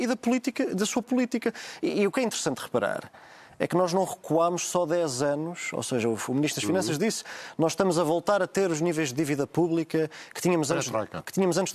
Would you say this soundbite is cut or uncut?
cut